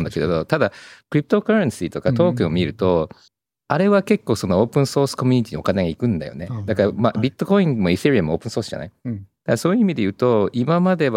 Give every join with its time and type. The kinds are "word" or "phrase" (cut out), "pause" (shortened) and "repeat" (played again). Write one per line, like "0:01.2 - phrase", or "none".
0:03.3 - pause